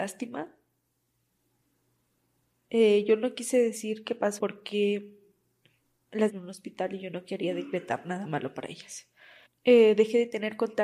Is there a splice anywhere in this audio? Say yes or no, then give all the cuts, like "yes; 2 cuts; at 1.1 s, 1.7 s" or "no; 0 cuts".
yes; 3 cuts; at 4.4 s, 6.3 s, 9.4 s